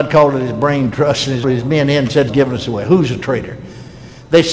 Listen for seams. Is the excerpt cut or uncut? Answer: cut